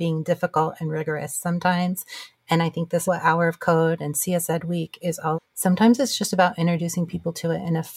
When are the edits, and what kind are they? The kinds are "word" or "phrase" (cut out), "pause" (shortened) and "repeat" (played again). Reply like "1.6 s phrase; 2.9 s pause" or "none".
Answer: 3.0 s word; 5.3 s word

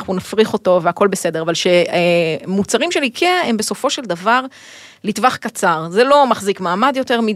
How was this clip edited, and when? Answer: none

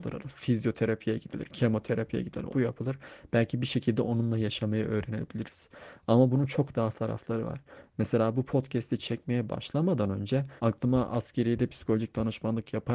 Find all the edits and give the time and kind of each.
2.5 s phrase; 6.9 s word; 10.6 s pause

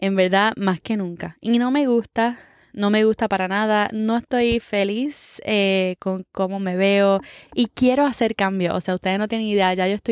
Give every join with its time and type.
none

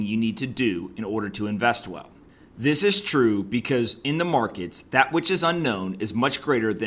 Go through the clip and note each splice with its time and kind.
none

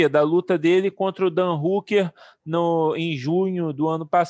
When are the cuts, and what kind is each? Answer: none

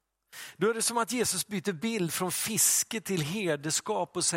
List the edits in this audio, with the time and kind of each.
none

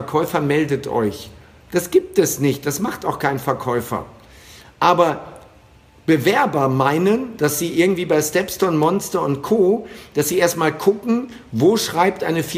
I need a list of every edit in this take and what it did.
none

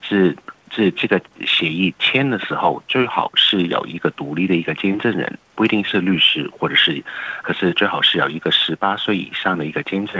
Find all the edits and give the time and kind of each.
7.4 s word

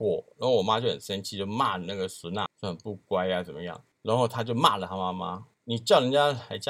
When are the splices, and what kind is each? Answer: 2.5 s word

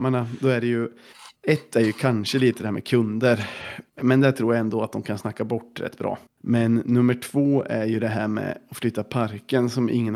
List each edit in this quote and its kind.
1.4 s pause; 3.9 s pause; 6.3 s pause

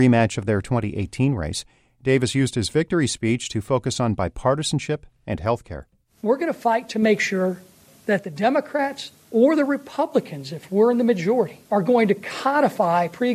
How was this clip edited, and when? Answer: 11.6 s pause

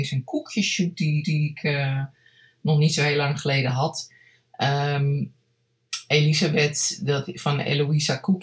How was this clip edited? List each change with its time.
1.2 s repeat

